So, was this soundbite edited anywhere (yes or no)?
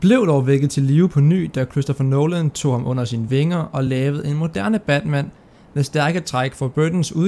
no